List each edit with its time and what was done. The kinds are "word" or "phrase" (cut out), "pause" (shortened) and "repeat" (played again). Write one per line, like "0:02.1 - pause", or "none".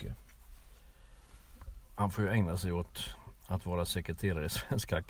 none